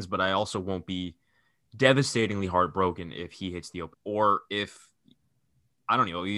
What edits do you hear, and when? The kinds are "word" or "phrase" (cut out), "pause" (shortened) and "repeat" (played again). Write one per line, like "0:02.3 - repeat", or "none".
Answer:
0:03.9 - word